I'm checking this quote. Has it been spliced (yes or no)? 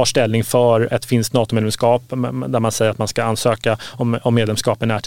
no